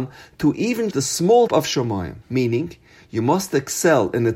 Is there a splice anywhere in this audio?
yes; 3 cuts; at 0.9 s, 1.5 s, 2.2 s

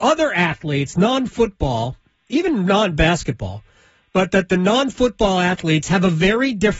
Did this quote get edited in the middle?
no; 0 cuts

